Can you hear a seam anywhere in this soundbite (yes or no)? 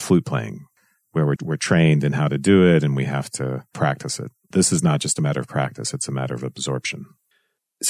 yes